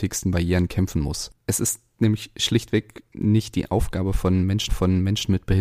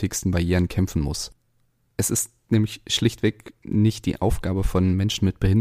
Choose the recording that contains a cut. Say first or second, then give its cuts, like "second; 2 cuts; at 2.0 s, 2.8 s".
first; 2 cuts; at 1.4 s, 4.7 s